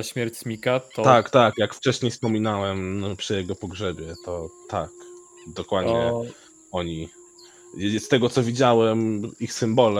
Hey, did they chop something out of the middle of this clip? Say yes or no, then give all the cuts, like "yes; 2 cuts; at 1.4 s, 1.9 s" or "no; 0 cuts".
no; 0 cuts